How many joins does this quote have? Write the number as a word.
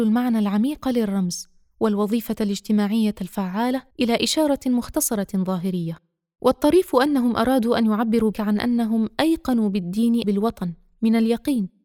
three